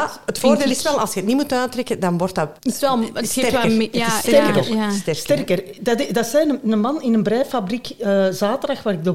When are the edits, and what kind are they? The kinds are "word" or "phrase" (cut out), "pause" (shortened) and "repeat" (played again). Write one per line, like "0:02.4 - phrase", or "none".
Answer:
0:02.6 - pause